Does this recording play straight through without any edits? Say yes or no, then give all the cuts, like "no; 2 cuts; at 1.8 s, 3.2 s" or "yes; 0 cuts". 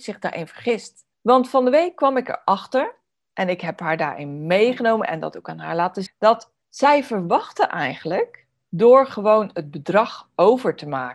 no; 3 cuts; at 1.1 s, 6.1 s, 6.6 s